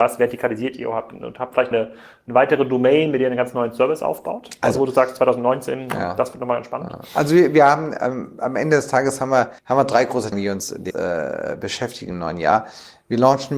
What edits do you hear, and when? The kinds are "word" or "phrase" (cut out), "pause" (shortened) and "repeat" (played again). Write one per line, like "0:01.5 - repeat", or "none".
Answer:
0:01.7 - word
0:09.6 - pause
0:10.3 - phrase
0:10.9 - word